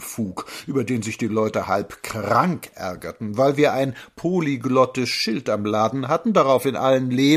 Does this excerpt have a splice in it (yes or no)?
no